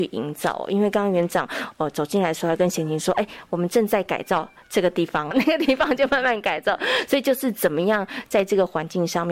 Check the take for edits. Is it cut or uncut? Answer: cut